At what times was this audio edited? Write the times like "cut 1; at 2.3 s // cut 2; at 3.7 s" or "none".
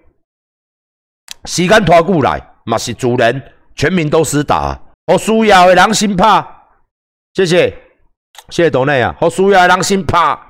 cut 1; at 4.9 s